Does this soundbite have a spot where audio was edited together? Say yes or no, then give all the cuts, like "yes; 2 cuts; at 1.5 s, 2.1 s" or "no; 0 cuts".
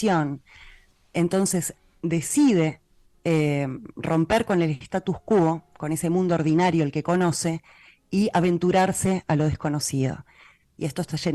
no; 0 cuts